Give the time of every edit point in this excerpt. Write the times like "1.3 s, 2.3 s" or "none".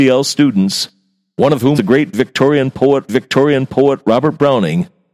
1.8 s, 3.1 s